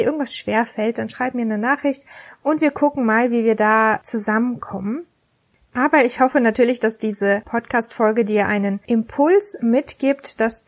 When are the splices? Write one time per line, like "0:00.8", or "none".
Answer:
none